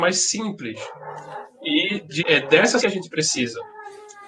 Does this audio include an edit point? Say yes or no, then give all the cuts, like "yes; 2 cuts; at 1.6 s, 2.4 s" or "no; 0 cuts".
yes; 2 cuts; at 2.2 s, 2.8 s